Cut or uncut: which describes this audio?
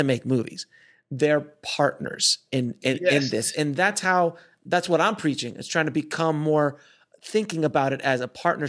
uncut